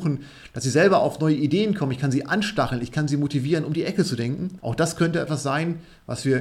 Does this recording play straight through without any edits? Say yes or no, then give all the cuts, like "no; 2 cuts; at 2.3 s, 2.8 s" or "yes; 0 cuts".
yes; 0 cuts